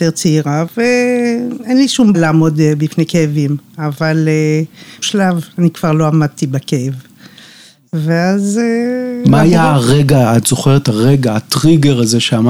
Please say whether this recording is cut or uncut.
cut